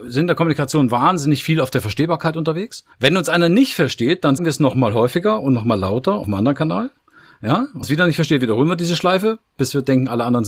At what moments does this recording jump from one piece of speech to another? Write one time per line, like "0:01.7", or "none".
0:02.9
0:04.4
0:06.2
0:07.8